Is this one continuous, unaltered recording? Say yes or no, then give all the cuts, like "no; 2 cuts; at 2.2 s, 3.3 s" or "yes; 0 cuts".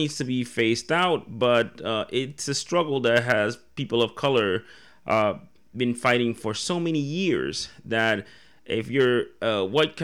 yes; 0 cuts